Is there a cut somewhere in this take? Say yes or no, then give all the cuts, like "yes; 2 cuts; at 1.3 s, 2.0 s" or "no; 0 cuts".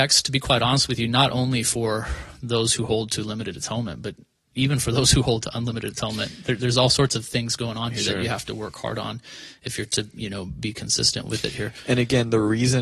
no; 0 cuts